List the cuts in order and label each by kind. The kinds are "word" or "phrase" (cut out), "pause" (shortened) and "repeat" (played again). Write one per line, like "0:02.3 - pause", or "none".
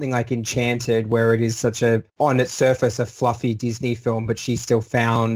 0:02.1 - pause

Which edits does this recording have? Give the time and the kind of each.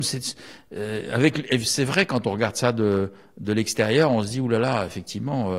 none

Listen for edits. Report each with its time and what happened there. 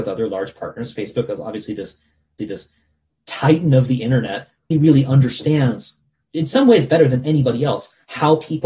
0:02.4 - repeat
0:04.7 - word

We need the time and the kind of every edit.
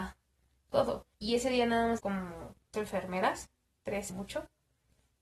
0:01.1 - pause
0:02.0 - word
0:02.7 - word
0:04.1 - phrase

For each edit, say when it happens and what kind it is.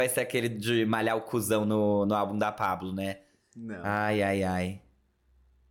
none

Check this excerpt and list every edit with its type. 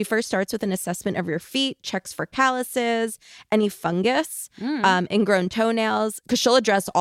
none

